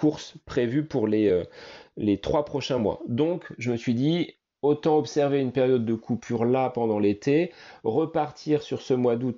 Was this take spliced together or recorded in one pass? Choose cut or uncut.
uncut